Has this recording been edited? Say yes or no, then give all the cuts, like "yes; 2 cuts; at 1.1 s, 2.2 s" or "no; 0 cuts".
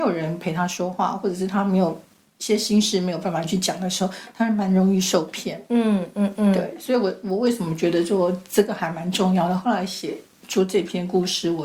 no; 0 cuts